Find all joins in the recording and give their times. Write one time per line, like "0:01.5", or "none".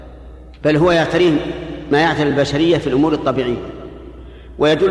none